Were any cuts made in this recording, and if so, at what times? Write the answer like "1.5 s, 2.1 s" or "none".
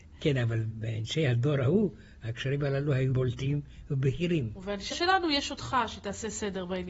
3.1 s, 4.9 s